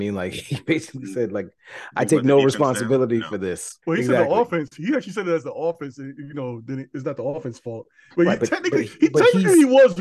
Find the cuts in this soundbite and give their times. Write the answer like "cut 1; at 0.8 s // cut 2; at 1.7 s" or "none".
cut 1; at 3.8 s